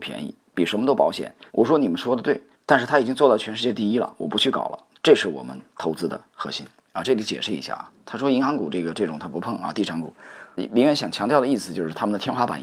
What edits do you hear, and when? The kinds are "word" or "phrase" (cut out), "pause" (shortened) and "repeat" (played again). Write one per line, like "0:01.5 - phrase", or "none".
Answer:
0:01.5 - pause
0:02.5 - pause
0:10.6 - word

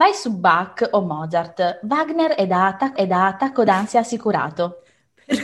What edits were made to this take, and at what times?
0:03.0 - repeat

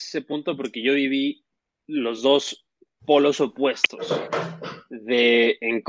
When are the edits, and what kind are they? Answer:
none

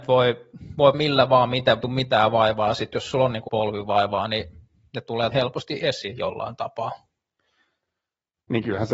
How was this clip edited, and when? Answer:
0:00.9 - word
0:01.8 - phrase
0:03.5 - word
0:05.3 - word

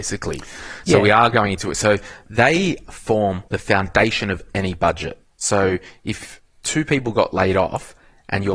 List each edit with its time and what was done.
0:03.5 - pause
0:05.2 - pause

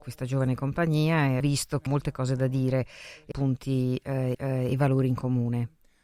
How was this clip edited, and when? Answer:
0:01.4 - word
0:01.9 - word
0:03.3 - word
0:04.3 - repeat

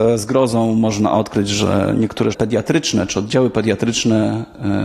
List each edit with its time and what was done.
0:02.3 - word

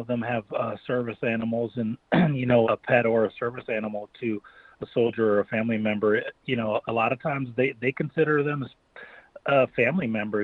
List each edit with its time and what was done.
0:02.6 - word

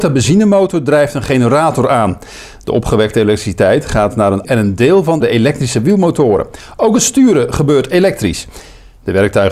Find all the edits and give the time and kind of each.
0:04.4 - word
0:05.2 - phrase

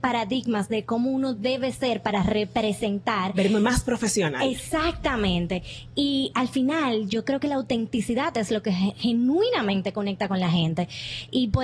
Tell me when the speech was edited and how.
none

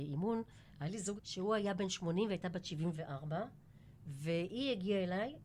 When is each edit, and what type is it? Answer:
0:01.2 - word

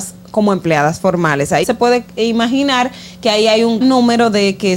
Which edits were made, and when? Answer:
0:01.6 - word
0:03.8 - word

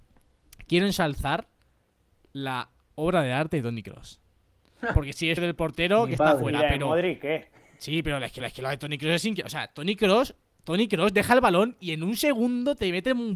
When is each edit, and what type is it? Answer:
0:02.8 - pause
0:05.4 - word
0:08.4 - repeat

